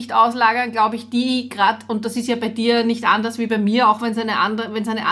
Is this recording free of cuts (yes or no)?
yes